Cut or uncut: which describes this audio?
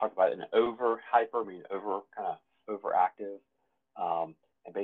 uncut